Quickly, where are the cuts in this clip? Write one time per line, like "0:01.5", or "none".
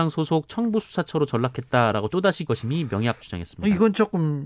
0:02.1
0:02.5
0:03.2